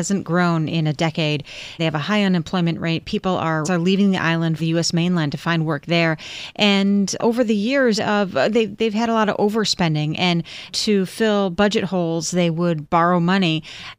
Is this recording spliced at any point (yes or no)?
yes